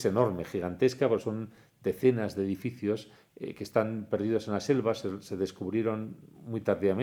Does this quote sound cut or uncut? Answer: uncut